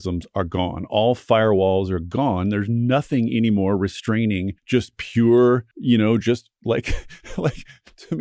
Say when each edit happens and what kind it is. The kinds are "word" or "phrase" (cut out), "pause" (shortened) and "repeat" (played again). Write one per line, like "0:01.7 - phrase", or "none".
0:04.6 - pause
0:05.7 - pause